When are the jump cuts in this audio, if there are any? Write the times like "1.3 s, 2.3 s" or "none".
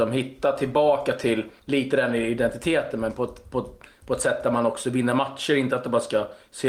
1.6 s